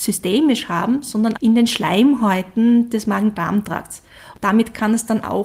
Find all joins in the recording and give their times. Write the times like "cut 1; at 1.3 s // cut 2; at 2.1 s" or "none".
cut 1; at 1.4 s